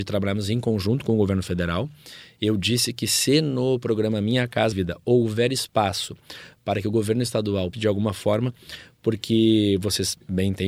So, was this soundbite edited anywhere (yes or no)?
yes